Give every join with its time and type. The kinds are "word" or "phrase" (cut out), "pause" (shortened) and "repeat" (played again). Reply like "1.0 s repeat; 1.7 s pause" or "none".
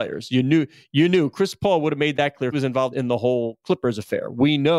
2.5 s phrase; 2.9 s word